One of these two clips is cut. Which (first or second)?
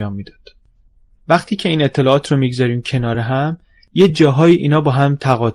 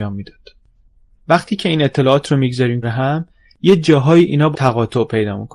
second